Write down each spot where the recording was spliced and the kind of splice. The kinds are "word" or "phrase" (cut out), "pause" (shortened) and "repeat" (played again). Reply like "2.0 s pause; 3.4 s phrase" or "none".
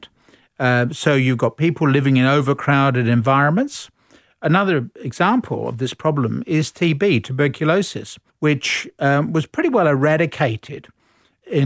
8.3 s pause